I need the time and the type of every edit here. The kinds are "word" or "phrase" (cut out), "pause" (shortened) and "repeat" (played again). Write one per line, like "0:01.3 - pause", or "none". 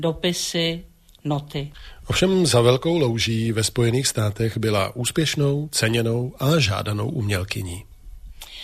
none